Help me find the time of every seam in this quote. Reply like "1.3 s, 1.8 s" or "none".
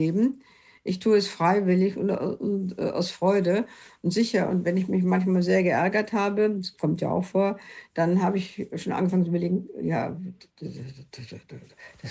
none